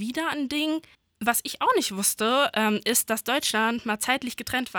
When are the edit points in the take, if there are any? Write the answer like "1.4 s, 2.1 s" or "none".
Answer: 0.9 s